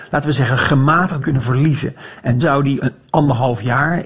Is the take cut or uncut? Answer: cut